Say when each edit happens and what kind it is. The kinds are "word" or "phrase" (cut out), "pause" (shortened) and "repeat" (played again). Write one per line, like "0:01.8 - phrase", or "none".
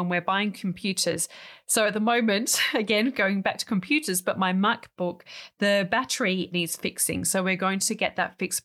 0:06.5 - word